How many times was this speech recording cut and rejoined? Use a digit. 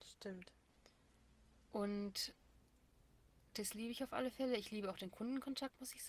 0